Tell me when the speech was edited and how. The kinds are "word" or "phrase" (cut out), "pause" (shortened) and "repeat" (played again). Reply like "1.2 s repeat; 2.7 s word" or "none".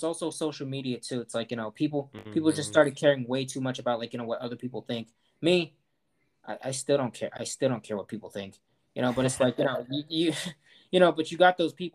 none